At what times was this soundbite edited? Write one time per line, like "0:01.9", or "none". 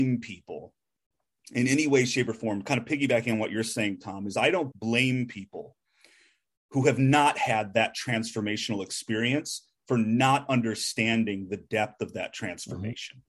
0:04.7